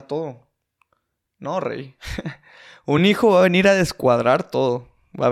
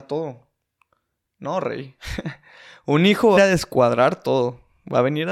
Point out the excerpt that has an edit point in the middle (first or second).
second